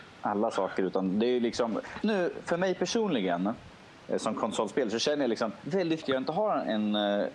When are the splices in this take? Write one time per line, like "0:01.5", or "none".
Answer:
0:02.0
0:06.0